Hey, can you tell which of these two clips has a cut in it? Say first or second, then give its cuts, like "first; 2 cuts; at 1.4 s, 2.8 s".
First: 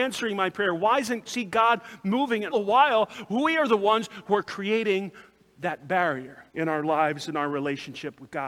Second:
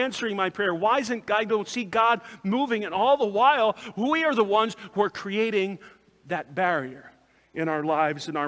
first; 3 cuts; at 1.3 s, 2.5 s, 6.5 s